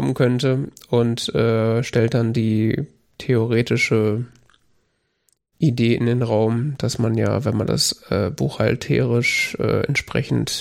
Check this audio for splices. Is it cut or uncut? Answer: uncut